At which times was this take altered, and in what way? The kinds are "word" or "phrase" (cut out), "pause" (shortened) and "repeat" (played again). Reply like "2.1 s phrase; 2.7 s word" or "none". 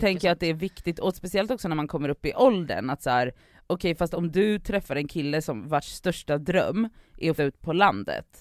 7.4 s word

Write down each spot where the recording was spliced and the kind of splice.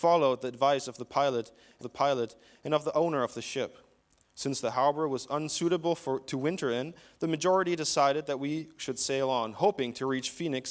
1.8 s repeat

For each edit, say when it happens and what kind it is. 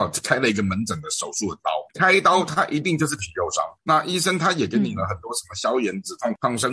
1.9 s pause; 3.8 s pause

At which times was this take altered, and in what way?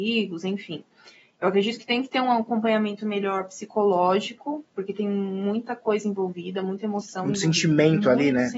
none

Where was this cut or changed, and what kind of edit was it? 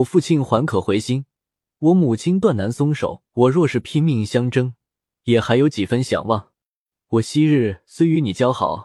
3.3 s pause

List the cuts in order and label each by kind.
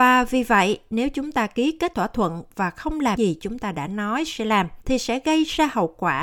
1.9 s word; 3.2 s word; 4.8 s pause

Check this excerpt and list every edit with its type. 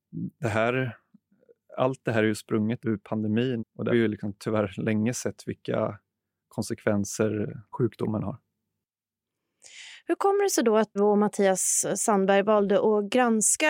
2.8 s word; 3.6 s word; 3.9 s word; 7.7 s word; 11.0 s phrase

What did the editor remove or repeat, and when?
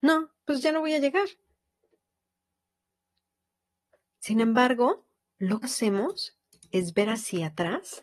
5.6 s word

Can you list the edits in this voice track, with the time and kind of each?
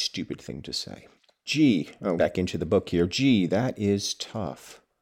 1.2 s pause; 2.2 s word

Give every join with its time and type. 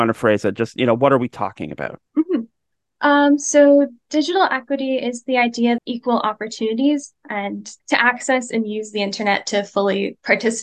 2.1 s pause; 5.8 s phrase; 7.8 s pause

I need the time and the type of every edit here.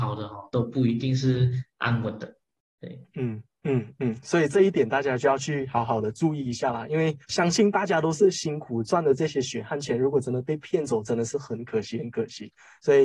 7.2 s pause

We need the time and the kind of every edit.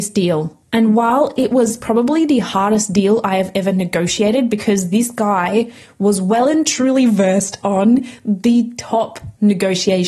none

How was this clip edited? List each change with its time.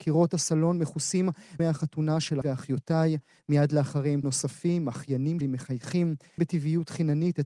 1.6 s word; 2.4 s word; 4.2 s word; 5.4 s word; 6.4 s word

